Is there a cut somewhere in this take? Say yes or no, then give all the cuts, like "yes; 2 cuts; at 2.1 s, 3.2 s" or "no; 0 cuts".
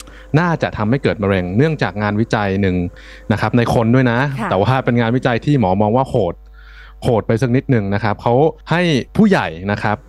yes; 2 cuts; at 8.6 s, 9.1 s